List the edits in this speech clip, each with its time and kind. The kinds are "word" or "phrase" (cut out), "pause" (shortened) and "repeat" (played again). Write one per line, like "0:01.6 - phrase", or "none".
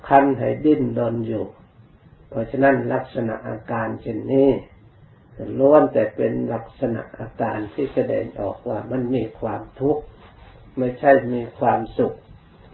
none